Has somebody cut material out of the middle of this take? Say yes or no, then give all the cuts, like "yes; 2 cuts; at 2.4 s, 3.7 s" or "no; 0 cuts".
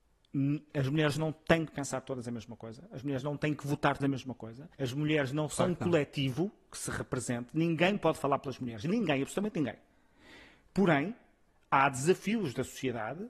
yes; 2 cuts; at 4.0 s, 4.7 s